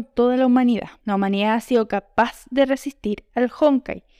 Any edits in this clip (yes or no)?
yes